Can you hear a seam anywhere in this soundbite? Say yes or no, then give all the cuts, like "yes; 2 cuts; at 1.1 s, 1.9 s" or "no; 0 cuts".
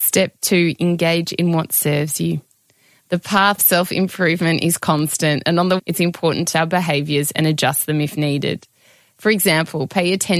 yes; 3 cuts; at 3.6 s, 5.8 s, 6.5 s